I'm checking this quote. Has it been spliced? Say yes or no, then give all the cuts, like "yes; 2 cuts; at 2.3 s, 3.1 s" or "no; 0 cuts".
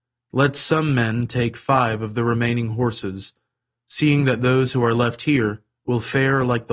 no; 0 cuts